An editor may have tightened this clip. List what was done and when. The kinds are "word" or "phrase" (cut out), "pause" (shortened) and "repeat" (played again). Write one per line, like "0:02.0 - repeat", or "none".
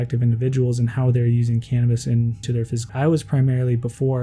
0:02.4 - word
0:02.9 - word